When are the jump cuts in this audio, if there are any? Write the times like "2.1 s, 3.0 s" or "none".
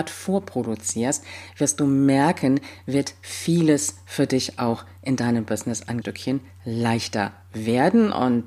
6.0 s